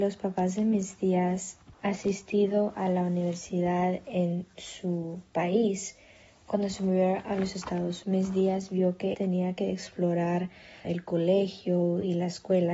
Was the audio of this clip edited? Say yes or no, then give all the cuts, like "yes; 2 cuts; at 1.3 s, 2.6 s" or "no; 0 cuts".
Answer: yes; 4 cuts; at 1.7 s, 8.0 s, 9.1 s, 10.8 s